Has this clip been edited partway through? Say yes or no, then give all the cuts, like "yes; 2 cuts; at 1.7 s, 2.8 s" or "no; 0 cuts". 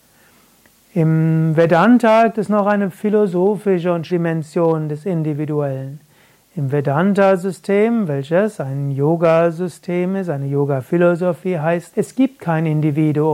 yes; 3 cuts; at 2.3 s, 4.1 s, 11.9 s